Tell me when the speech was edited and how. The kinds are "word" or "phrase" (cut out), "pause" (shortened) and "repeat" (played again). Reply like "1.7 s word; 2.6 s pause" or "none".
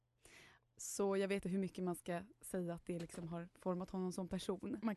1.4 s word